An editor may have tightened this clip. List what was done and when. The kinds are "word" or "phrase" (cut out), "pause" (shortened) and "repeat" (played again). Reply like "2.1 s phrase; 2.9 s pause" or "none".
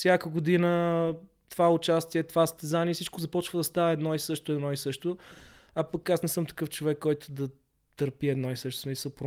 none